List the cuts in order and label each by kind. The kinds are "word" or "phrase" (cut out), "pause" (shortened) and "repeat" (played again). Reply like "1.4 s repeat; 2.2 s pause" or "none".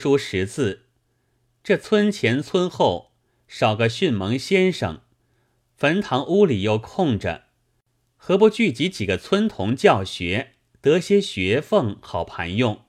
none